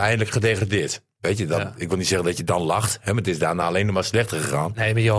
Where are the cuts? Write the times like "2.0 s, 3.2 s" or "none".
none